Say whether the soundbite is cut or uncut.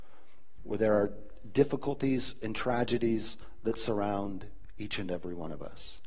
uncut